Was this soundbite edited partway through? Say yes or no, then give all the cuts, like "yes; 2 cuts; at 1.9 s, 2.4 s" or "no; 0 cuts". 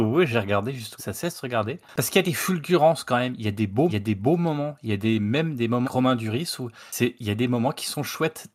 yes; 5 cuts; at 1.0 s, 1.9 s, 3.9 s, 5.8 s, 6.9 s